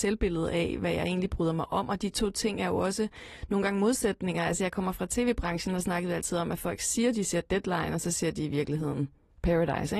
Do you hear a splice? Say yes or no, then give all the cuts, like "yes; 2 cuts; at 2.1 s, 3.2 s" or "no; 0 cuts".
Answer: no; 0 cuts